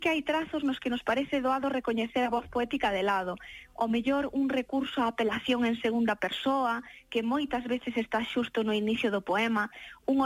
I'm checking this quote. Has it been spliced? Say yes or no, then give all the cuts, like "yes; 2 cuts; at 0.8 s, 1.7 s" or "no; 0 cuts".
no; 0 cuts